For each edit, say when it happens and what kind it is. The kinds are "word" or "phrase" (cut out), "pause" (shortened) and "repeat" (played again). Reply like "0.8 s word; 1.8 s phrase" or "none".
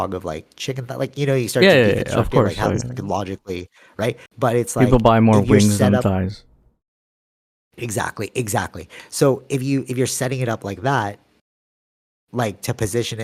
4.3 s pause